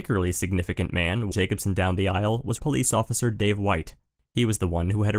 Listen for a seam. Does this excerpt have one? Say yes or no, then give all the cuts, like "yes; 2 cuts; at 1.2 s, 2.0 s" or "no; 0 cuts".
yes; 2 cuts; at 1.3 s, 2.6 s